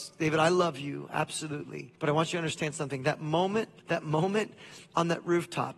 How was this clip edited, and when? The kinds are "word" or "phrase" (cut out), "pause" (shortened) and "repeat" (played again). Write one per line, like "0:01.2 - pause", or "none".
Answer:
0:02.0 - pause
0:03.8 - pause